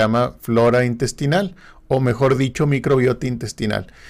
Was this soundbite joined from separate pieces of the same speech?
no; 0 cuts

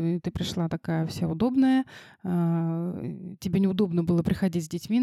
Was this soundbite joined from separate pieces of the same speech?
no; 0 cuts

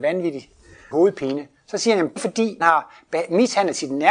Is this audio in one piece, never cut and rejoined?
no; 3 cuts; at 0.9 s, 2.2 s, 2.6 s

